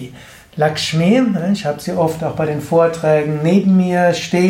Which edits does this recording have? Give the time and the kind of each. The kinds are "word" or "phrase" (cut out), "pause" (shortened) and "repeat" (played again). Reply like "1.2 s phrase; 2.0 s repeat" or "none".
none